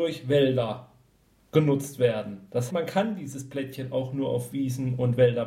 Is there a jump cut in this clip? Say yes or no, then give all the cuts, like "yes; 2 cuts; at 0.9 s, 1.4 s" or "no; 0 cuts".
yes; 1 cut; at 2.7 s